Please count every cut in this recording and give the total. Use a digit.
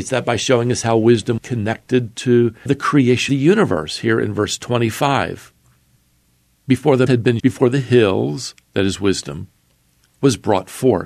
6